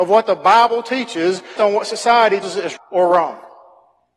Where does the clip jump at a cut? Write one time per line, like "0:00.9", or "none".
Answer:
0:01.6
0:02.4
0:02.8